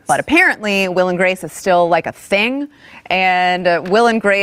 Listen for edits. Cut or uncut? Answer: uncut